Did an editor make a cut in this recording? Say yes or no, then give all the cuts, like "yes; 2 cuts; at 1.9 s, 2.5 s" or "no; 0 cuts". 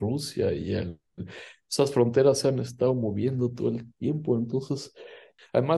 no; 0 cuts